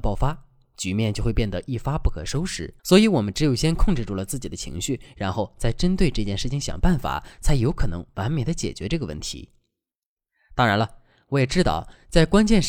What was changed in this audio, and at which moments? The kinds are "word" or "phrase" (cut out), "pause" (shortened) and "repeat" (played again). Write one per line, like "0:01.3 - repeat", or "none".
0:02.8 - pause